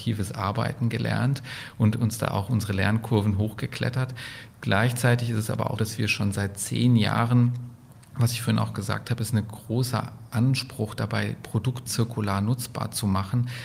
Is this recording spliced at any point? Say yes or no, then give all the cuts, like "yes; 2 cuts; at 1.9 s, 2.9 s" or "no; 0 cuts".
yes; 2 cuts; at 5.8 s, 11.9 s